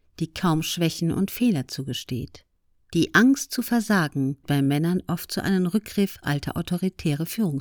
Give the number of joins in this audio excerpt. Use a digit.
2